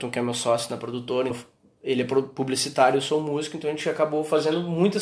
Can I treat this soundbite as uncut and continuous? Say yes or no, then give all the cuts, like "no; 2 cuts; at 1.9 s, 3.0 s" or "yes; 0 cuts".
no; 1 cut; at 1.3 s